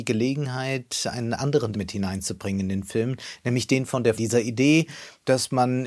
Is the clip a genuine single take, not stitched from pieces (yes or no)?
no